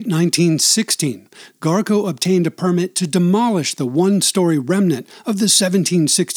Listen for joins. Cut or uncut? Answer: uncut